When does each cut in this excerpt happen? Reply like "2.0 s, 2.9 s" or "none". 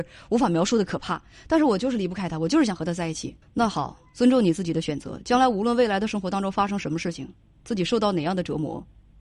3.4 s